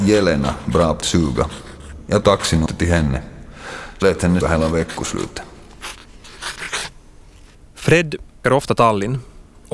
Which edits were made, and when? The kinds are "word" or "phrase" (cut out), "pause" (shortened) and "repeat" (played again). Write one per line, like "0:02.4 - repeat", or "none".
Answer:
0:01.0 - word
0:02.2 - word
0:02.7 - word
0:04.0 - word
0:04.4 - word
0:08.4 - word